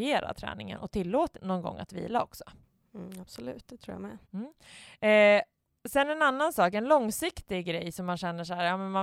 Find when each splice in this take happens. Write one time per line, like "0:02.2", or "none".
0:01.3
0:04.2